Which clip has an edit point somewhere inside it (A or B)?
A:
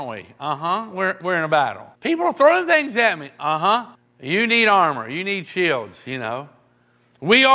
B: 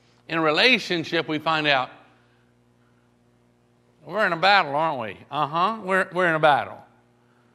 A